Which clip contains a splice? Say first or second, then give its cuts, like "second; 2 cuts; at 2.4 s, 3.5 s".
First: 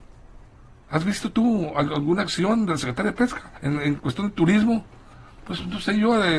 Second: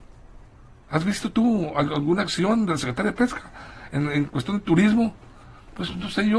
first; 1 cut; at 3.6 s